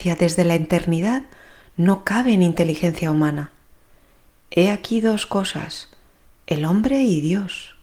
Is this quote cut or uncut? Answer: uncut